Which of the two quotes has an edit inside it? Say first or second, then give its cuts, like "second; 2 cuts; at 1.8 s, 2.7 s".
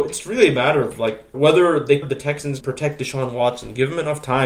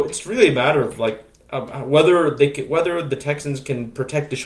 first; 3 cuts; at 1.3 s, 2.0 s, 2.6 s